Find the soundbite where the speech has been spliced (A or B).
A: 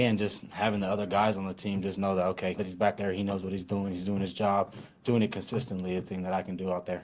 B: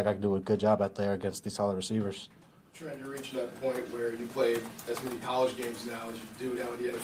A